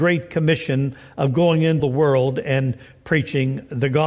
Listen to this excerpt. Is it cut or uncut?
cut